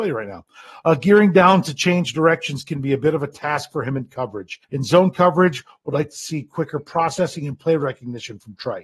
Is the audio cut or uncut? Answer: cut